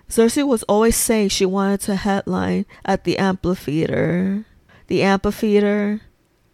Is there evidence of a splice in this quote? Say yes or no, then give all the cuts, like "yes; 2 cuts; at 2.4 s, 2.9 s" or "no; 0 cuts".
yes; 2 cuts; at 2.8 s, 4.7 s